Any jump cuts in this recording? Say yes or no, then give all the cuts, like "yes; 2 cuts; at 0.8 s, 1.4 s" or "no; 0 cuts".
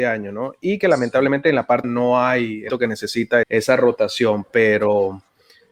yes; 3 cuts; at 1.8 s, 2.7 s, 3.4 s